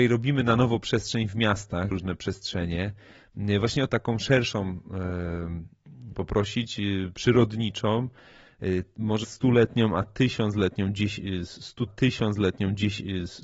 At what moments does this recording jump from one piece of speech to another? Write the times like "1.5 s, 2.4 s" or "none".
1.9 s, 3.9 s, 6.1 s, 9.2 s, 11.9 s